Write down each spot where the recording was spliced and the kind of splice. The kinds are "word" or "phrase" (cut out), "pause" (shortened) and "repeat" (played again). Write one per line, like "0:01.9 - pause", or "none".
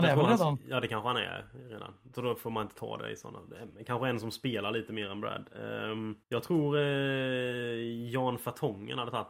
0:06.2 - pause